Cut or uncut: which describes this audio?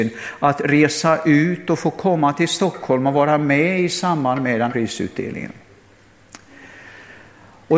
cut